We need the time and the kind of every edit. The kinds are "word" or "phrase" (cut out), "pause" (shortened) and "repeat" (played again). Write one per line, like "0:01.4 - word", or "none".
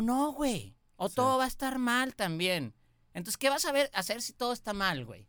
none

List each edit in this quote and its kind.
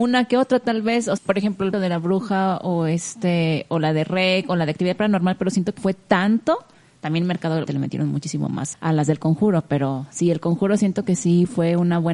0:01.2 - word
0:01.7 - word
0:05.8 - word
0:07.7 - word
0:08.7 - word

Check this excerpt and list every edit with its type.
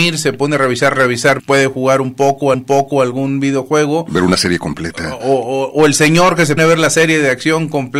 0:00.9 - phrase
0:01.4 - phrase
0:02.5 - repeat
0:05.2 - word
0:06.6 - word

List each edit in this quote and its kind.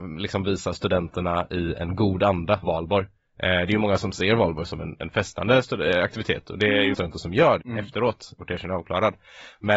0:02.6 - word
0:06.9 - word
0:07.6 - word
0:08.4 - word

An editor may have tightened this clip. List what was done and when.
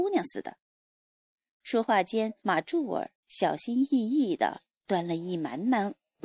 0:02.4 - pause
0:03.2 - pause

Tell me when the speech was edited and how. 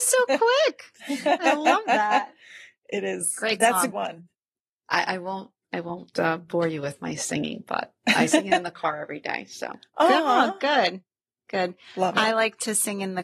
0:03.9 - word

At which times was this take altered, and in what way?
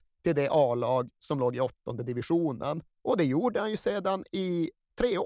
0:02.9 - pause

